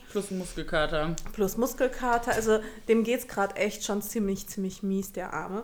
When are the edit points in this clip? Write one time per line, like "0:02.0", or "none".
none